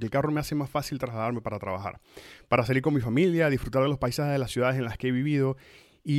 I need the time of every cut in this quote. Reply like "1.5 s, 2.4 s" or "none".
none